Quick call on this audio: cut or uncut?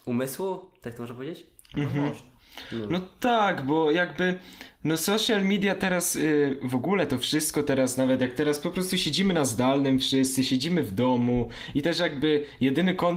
uncut